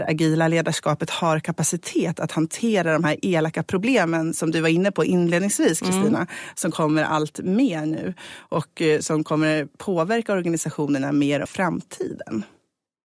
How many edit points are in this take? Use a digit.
1